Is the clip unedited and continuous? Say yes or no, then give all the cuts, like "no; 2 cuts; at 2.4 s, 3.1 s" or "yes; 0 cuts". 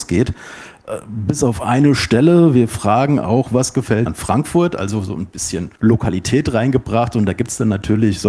no; 2 cuts; at 4.1 s, 5.8 s